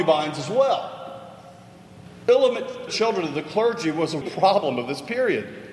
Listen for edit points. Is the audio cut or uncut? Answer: cut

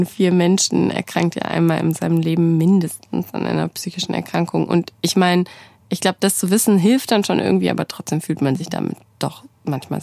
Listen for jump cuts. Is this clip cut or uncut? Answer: uncut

